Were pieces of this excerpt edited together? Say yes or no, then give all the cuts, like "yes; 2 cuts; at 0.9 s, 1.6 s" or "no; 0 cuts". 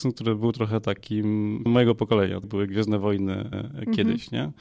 yes; 3 cuts; at 1.7 s, 2.4 s, 3.5 s